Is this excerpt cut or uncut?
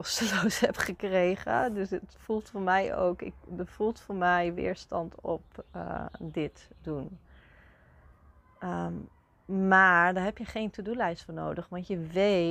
uncut